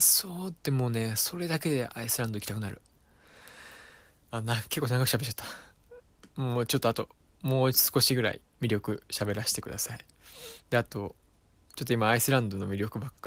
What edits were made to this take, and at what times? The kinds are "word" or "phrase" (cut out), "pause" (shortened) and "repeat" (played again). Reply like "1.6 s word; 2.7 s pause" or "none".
none